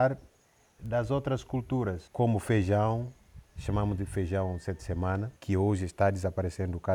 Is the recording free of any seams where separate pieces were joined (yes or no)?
no